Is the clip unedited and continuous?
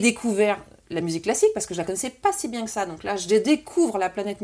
yes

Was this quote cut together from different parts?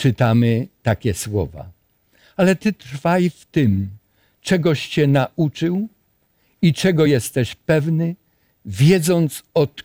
no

